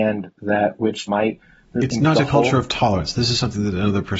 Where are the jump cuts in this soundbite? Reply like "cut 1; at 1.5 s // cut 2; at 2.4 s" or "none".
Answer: cut 1; at 1.1 s // cut 2; at 2.1 s